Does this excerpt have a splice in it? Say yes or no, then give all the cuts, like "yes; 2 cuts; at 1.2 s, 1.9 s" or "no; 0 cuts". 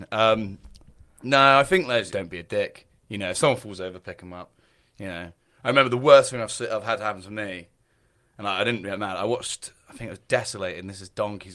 yes; 1 cut; at 2.1 s